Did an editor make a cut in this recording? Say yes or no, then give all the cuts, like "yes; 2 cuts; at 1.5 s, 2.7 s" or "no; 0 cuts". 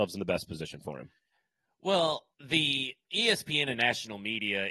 yes; 1 cut; at 2.3 s